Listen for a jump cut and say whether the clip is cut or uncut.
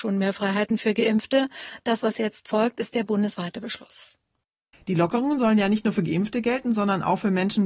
uncut